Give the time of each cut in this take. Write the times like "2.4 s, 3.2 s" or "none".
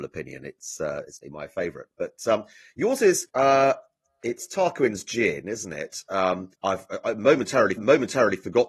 1.2 s, 3.3 s, 6.5 s, 7.8 s